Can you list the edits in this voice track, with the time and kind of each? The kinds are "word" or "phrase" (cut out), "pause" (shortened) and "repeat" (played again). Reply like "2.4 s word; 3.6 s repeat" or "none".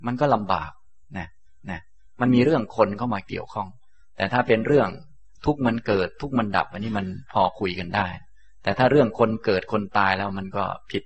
1.6 s repeat

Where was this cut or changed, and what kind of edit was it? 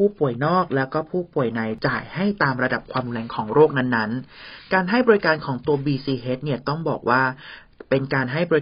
none

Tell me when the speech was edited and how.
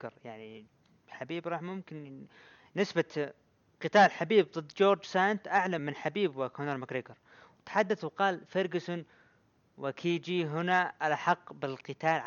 5.8 s word

